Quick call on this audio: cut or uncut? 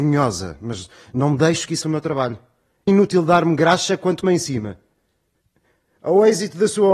cut